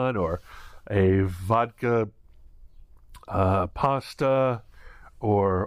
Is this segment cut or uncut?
uncut